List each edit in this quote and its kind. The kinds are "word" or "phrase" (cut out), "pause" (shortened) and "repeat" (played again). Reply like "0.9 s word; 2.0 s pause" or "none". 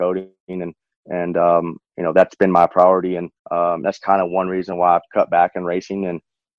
3.4 s pause